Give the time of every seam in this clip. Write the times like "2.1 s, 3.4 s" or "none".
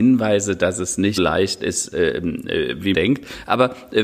1.2 s, 2.9 s